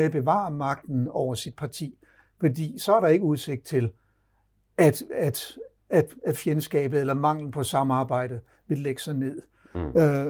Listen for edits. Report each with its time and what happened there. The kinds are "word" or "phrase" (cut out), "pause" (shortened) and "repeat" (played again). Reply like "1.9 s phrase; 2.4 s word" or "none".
none